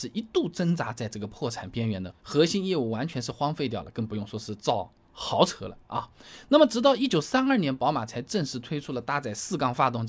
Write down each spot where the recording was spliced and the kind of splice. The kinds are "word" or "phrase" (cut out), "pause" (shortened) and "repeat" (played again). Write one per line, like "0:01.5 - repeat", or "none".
0:02.2 - pause